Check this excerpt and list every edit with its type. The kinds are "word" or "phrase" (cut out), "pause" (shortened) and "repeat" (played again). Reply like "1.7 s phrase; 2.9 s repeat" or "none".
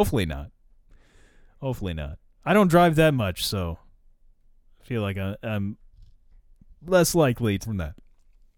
7.6 s word